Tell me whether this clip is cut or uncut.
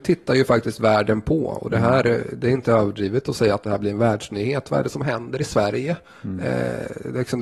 uncut